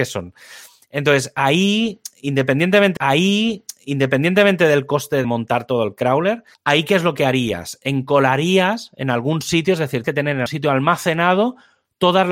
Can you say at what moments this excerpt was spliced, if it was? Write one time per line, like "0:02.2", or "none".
0:03.0
0:05.2
0:06.5
0:10.0
0:10.5